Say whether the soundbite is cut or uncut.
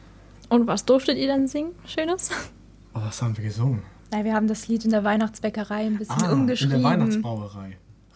cut